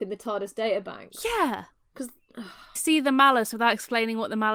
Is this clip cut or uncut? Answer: cut